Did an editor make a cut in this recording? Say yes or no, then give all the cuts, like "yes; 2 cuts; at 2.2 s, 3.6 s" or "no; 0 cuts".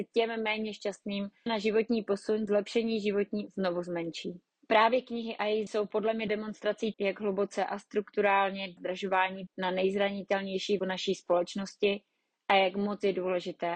yes; 9 cuts; at 1.5 s, 2.5 s, 3.5 s, 5.7 s, 6.3 s, 6.9 s, 8.8 s, 9.5 s, 10.8 s